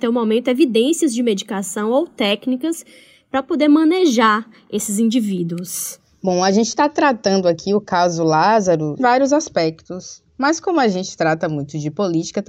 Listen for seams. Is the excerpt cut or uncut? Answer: cut